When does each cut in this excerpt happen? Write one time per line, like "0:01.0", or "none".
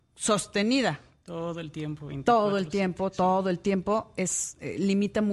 none